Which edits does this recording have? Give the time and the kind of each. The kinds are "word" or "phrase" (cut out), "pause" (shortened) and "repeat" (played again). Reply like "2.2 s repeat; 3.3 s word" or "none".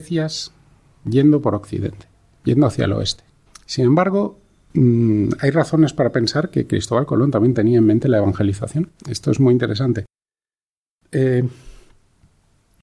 3.5 s pause; 9.0 s pause